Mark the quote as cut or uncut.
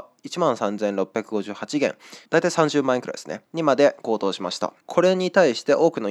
cut